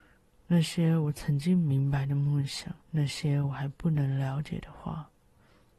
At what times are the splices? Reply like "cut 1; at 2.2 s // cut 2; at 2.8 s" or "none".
cut 1; at 2.8 s